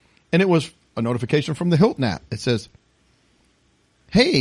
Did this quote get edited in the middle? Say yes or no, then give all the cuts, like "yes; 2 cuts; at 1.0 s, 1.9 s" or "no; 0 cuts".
no; 0 cuts